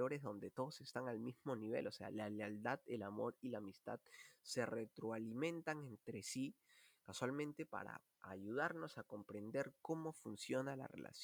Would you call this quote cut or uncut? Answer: cut